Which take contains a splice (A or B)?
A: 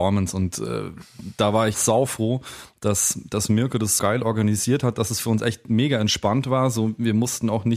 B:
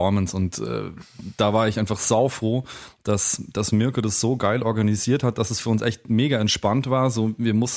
A